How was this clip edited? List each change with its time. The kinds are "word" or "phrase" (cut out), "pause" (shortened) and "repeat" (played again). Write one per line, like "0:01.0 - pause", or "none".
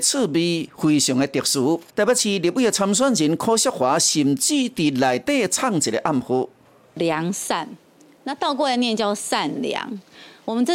0:01.9 - pause

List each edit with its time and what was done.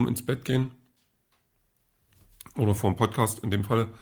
none

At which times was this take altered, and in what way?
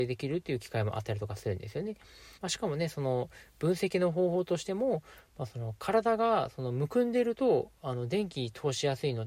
0:02.4 - pause

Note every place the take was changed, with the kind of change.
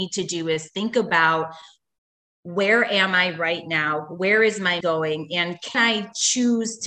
0:04.8 - word
0:05.7 - word

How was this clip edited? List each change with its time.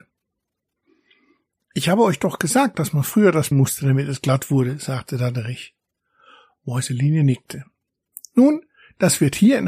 0:03.5 - phrase

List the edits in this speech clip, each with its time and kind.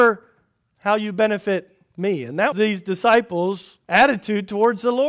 0:02.5 - word
0:03.8 - pause

